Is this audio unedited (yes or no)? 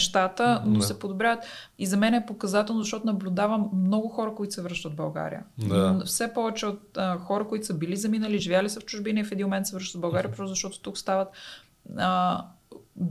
yes